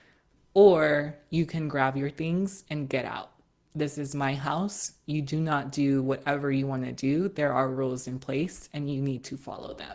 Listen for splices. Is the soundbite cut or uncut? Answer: uncut